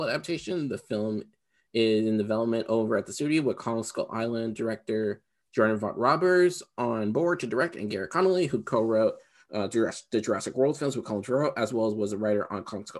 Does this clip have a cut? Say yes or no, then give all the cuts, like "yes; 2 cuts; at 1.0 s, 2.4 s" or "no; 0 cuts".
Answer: no; 0 cuts